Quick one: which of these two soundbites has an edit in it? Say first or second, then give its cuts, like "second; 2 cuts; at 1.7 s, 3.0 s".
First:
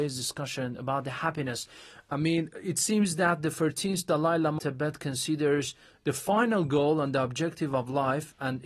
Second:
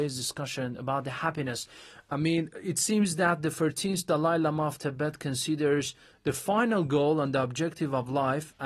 first; 1 cut; at 4.6 s